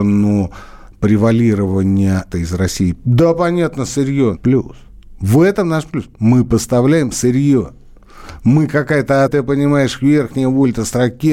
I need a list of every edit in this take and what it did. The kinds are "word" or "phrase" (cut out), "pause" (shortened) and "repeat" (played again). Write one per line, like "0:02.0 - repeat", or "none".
0:02.3 - word
0:04.3 - phrase
0:09.3 - word